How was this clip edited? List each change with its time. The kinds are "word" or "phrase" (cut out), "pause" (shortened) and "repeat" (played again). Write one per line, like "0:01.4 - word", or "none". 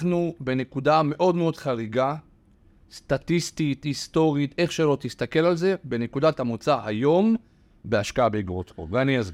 none